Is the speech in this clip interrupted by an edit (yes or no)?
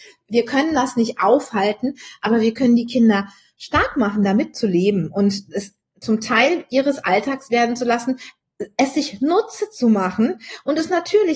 no